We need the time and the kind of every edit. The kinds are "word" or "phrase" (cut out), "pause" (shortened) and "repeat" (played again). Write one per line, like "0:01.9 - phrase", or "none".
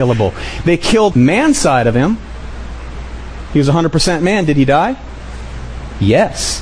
0:01.1 - word